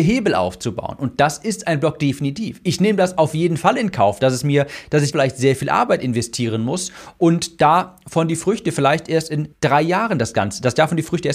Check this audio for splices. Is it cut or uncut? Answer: cut